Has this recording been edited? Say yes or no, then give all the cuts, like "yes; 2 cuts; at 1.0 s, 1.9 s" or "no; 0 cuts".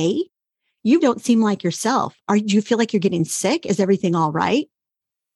yes; 1 cut; at 1.0 s